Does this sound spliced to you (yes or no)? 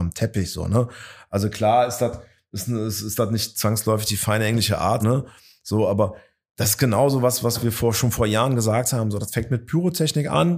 yes